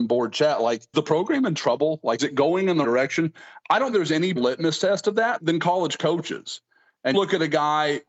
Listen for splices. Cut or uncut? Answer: cut